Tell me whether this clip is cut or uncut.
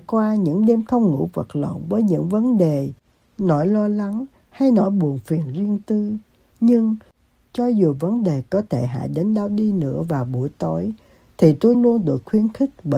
cut